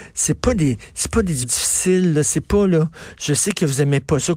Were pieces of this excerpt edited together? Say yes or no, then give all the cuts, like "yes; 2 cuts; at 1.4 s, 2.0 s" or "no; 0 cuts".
yes; 1 cut; at 1.4 s